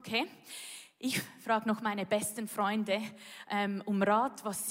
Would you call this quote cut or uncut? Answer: uncut